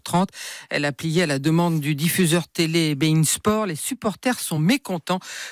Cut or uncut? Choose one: uncut